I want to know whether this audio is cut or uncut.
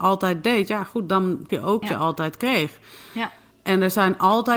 cut